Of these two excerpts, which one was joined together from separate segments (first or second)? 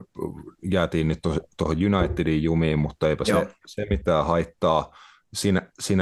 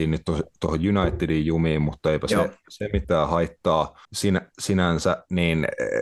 second